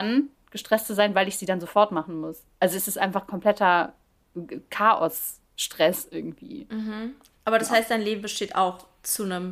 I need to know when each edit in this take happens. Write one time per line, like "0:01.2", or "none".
none